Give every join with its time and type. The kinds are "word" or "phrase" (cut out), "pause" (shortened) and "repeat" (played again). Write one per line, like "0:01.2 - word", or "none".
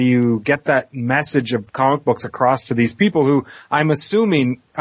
none